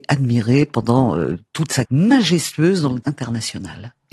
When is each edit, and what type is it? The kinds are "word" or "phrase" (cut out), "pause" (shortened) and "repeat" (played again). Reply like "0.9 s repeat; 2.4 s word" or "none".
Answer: 1.8 s word; 3.0 s word